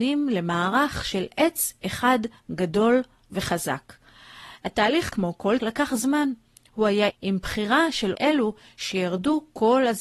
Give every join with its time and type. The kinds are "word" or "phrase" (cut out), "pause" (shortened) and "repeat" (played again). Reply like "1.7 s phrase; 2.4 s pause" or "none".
5.1 s word; 5.6 s word; 7.1 s word; 8.1 s word